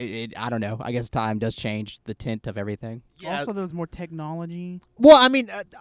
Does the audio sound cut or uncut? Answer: uncut